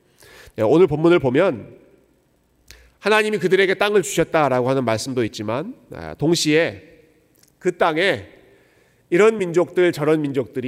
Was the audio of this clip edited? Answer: no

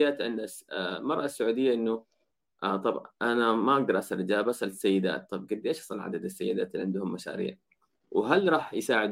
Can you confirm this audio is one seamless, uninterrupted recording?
yes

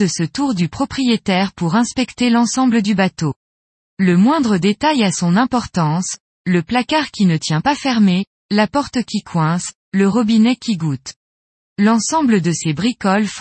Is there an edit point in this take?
no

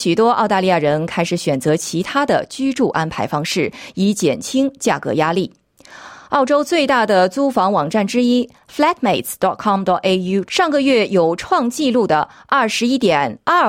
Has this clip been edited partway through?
yes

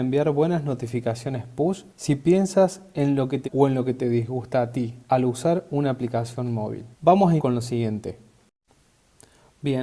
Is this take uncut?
no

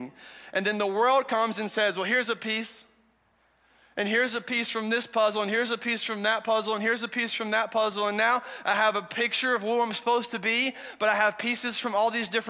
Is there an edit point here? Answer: no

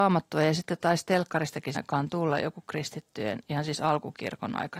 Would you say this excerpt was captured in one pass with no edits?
no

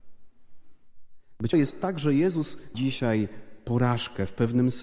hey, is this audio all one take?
no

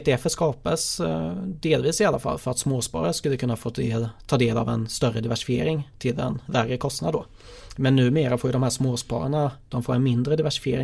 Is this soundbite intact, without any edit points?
yes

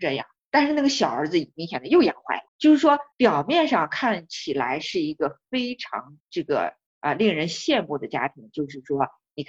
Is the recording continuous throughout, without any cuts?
no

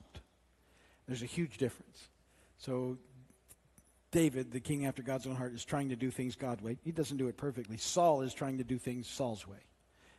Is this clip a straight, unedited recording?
yes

